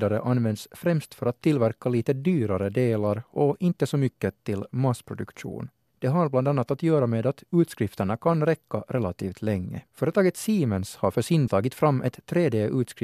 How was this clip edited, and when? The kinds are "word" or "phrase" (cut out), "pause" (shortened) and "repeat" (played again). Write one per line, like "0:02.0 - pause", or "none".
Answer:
0:05.9 - pause
0:09.9 - pause
0:11.5 - word